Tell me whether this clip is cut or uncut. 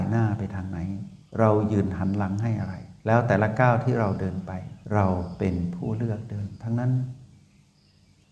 cut